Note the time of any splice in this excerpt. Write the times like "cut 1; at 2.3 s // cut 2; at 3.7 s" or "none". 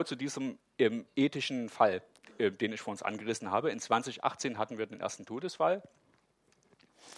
none